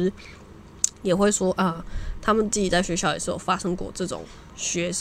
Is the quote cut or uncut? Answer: cut